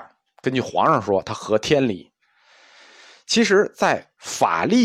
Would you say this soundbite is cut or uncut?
uncut